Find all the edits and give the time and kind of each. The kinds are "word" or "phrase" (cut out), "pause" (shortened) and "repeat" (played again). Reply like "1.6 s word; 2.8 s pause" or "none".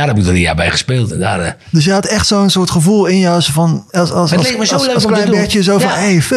3.9 s pause